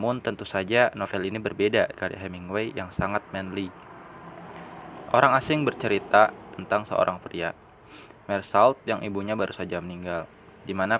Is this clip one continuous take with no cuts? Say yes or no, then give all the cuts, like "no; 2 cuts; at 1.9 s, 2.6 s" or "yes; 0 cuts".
no; 1 cut; at 1.9 s